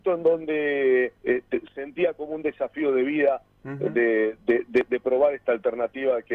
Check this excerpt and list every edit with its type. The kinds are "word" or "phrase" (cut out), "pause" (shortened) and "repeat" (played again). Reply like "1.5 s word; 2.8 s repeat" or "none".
1.2 s pause